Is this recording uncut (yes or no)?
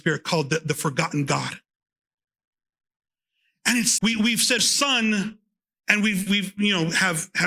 no